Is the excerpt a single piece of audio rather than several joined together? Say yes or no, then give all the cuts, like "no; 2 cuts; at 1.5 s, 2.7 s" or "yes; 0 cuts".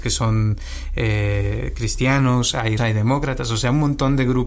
no; 1 cut; at 2.8 s